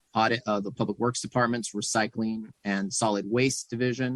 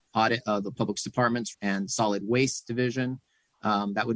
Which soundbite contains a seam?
second; 2 cuts; at 1.0 s, 1.5 s

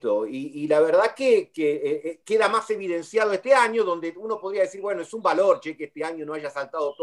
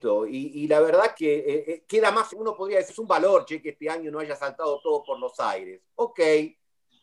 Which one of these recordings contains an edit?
second; 3 cuts; at 1.1 s, 2.3 s, 2.9 s

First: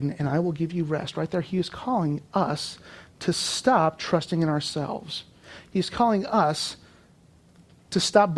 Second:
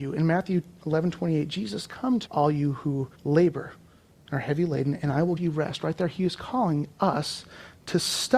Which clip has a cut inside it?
second; 4 cuts; at 1.8 s, 2.3 s, 3.1 s, 5.4 s

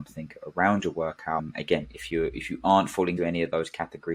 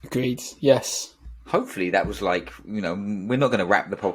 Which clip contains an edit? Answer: first; 1 cut; at 3.2 s

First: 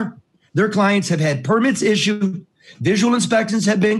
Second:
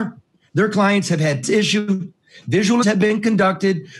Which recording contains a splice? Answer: second; 2 cuts; at 1.4 s, 2.8 s

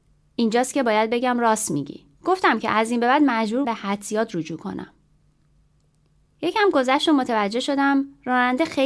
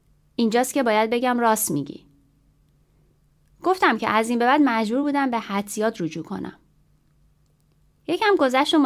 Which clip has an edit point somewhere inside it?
first; 2 cuts; at 2.1 s, 3.6 s

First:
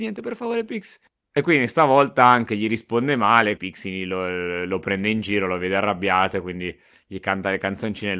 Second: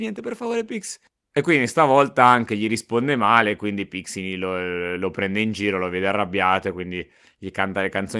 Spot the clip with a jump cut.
first; 1 cut; at 3.6 s

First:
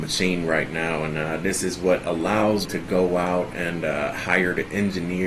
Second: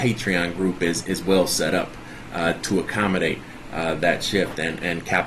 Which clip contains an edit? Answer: first; 1 cut; at 2.6 s

